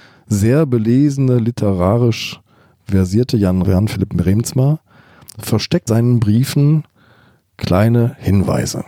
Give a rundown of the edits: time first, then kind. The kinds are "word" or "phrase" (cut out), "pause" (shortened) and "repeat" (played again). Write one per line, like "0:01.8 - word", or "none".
0:03.6 - word
0:05.9 - word